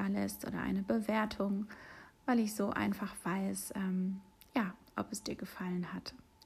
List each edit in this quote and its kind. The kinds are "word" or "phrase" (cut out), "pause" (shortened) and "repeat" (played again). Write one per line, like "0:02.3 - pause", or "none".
none